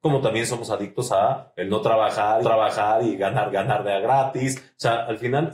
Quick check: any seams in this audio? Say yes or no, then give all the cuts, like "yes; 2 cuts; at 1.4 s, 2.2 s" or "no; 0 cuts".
yes; 2 cuts; at 2.4 s, 3.5 s